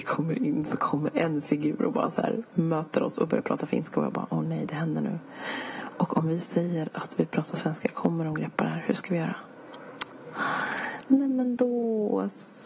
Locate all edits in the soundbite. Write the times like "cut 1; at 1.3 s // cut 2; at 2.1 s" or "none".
none